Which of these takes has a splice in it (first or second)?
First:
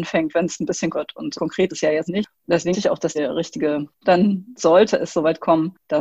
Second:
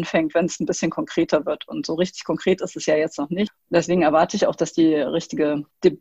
first